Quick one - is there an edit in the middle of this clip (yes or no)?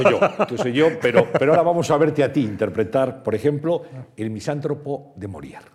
no